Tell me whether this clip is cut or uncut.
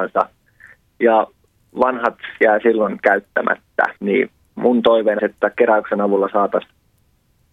cut